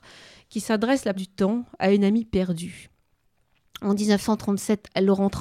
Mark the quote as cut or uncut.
cut